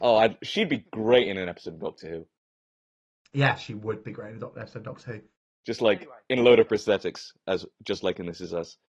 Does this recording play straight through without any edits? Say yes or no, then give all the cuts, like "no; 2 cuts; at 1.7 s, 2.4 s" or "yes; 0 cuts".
yes; 0 cuts